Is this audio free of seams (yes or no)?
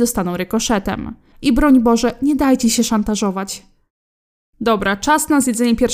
yes